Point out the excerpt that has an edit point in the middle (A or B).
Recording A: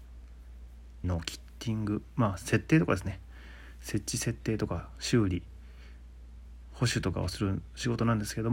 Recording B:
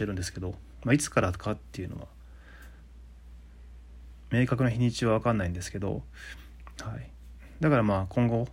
A